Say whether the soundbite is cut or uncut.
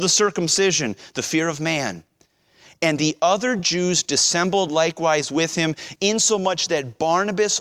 uncut